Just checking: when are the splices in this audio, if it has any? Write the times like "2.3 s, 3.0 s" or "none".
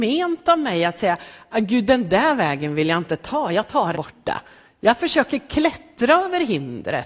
3.9 s